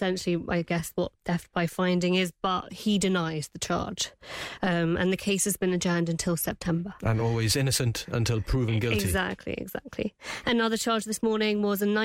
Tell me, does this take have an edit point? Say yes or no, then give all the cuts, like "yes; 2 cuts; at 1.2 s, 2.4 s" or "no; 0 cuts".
no; 0 cuts